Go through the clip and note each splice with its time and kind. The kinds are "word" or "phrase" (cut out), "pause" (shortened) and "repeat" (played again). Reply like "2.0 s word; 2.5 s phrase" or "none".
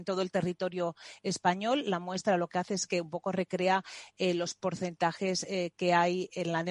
none